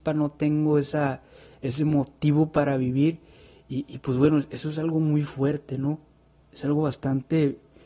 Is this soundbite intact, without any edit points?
yes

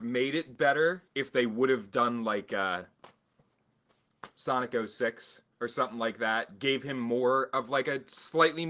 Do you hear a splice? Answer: yes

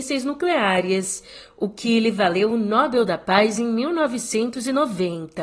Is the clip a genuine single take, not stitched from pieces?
yes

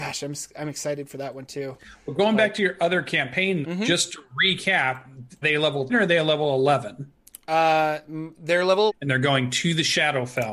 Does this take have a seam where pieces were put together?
yes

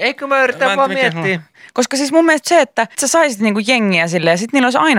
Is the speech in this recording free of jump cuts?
no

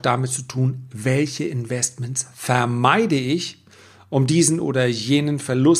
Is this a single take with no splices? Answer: yes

